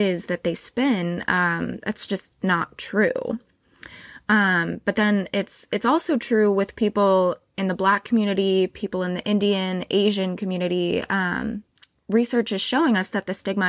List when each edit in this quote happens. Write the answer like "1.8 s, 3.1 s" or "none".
none